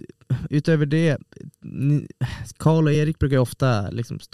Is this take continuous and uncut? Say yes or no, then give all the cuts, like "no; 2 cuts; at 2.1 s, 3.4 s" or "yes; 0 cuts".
yes; 0 cuts